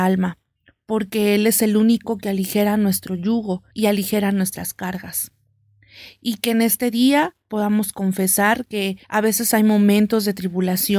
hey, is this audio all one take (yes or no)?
no